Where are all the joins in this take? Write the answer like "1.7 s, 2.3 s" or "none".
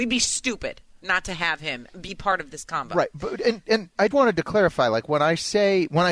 1.9 s, 4.1 s

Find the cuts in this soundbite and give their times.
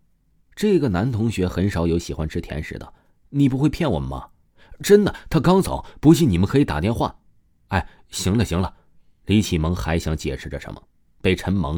none

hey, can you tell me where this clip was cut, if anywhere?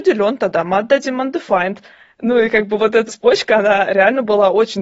3.1 s

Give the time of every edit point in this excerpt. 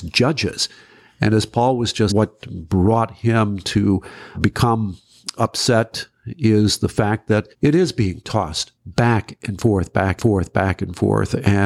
2.1 s, 4.3 s, 7.5 s, 8.8 s, 10.2 s

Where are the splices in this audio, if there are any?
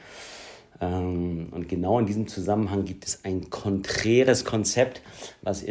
none

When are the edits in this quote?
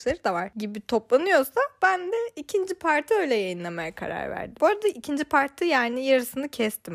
none

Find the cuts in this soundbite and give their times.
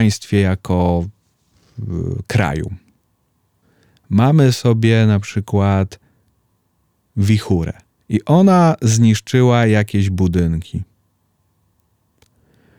none

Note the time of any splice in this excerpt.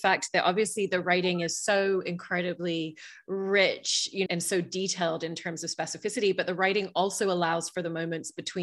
4.3 s

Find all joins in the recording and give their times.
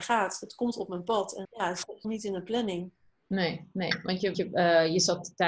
1.4 s, 2.0 s, 4.3 s

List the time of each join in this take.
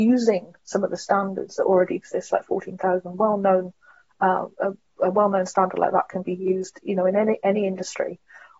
none

